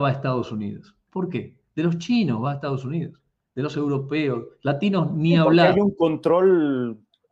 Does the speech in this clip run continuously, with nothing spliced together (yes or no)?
yes